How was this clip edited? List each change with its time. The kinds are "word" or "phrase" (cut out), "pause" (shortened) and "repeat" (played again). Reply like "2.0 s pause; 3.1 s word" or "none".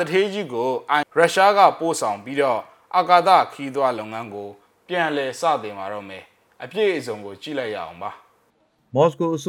1.0 s word

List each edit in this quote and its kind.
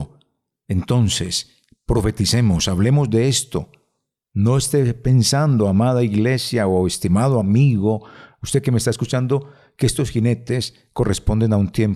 none

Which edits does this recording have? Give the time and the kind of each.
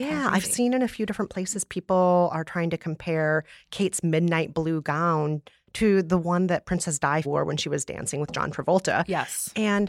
7.2 s word

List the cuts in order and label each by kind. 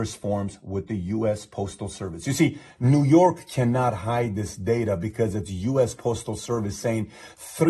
none

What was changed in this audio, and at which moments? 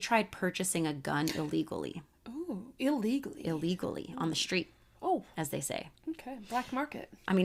none

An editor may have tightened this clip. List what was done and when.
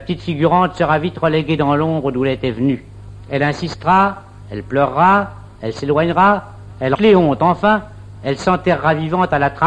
7.0 s phrase

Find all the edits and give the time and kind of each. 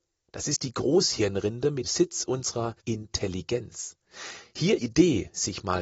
1.8 s word; 2.8 s pause; 4.8 s phrase

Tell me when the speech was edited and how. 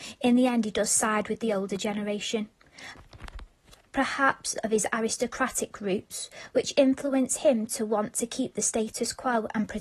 4.6 s word

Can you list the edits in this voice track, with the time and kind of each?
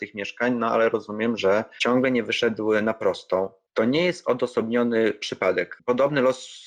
none

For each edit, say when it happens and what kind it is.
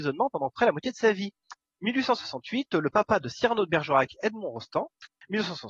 none

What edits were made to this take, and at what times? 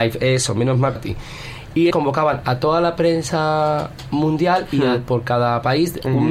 1.0 s phrase; 1.9 s word

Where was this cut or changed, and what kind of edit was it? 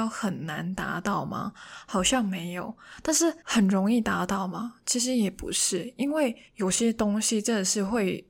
3.4 s pause; 6.5 s pause

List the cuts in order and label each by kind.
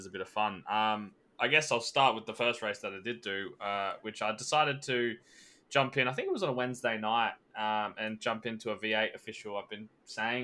none

